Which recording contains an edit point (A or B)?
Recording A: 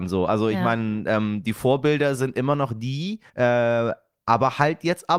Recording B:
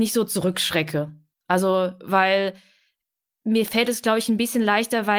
A